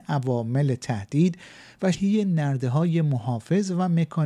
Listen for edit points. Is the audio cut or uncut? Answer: cut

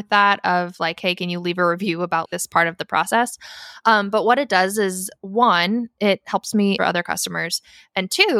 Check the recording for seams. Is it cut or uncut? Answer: cut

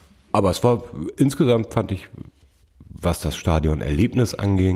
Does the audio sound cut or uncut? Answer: uncut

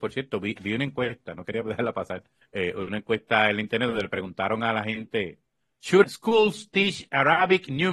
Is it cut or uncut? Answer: cut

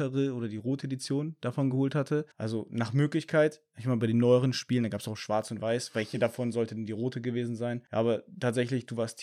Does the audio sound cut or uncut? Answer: uncut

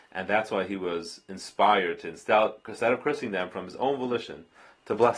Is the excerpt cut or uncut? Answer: uncut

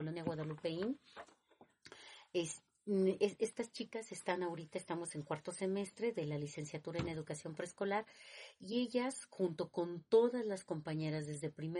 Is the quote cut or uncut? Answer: uncut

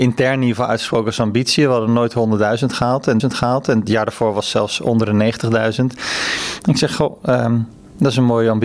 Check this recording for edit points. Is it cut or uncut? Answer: cut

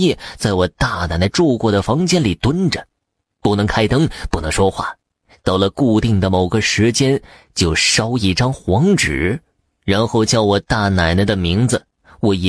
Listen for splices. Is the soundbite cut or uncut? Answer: uncut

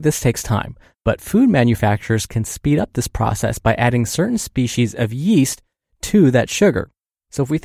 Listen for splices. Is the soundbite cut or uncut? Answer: uncut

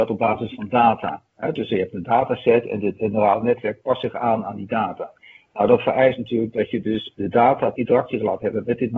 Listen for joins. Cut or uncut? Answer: uncut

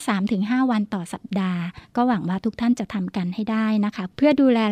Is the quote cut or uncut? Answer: uncut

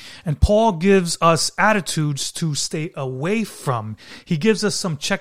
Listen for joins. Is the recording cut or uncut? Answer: uncut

